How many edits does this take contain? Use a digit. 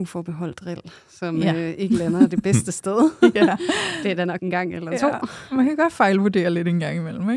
1